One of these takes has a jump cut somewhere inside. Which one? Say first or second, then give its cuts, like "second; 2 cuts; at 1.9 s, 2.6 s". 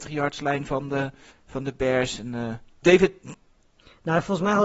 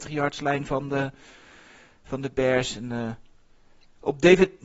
first; 2 cuts; at 1.3 s, 2.8 s